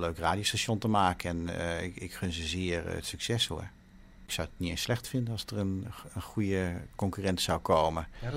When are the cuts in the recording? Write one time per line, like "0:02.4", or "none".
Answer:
none